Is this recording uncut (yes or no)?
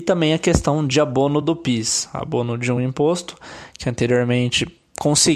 yes